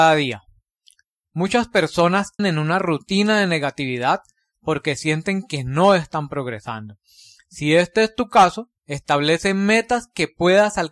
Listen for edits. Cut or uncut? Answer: cut